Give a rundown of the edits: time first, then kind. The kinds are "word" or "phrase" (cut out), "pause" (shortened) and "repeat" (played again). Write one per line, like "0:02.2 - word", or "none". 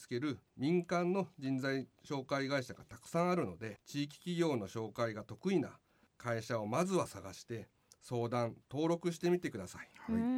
0:03.8 - phrase